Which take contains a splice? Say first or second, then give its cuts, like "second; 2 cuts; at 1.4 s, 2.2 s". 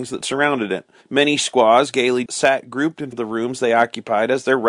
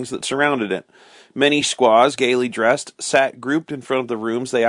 first; 3 cuts; at 1.0 s, 2.3 s, 3.1 s